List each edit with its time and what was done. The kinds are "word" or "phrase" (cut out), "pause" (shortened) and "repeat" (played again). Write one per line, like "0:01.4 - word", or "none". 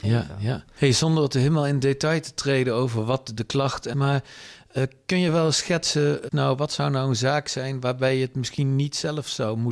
0:03.9 - phrase
0:06.3 - word